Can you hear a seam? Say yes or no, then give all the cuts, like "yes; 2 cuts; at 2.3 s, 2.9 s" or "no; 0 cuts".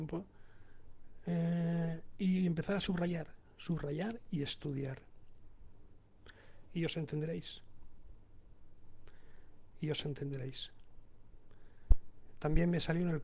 no; 0 cuts